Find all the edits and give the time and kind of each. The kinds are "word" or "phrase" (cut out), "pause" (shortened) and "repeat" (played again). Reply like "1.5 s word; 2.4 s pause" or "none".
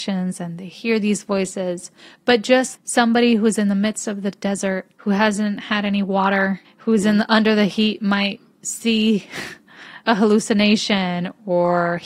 2.0 s pause; 4.9 s pause; 6.6 s pause

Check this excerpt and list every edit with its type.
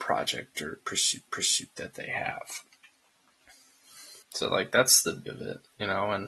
1.3 s repeat; 4.2 s pause; 5.3 s phrase

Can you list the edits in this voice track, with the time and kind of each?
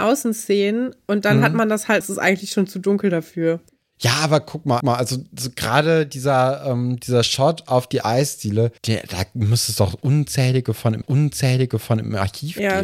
2.0 s phrase; 3.7 s pause; 4.8 s repeat; 8.8 s pause; 11.0 s repeat

